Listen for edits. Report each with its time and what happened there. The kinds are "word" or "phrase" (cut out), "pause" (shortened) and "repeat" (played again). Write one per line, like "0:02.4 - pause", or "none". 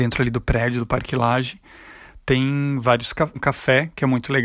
0:03.4 - word